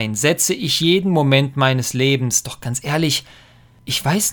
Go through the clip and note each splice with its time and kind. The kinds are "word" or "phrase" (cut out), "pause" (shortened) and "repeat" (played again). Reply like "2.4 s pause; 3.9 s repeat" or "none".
none